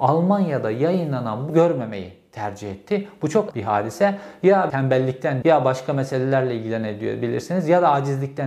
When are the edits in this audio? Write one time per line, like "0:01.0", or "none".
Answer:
0:01.5
0:03.5
0:04.7
0:05.4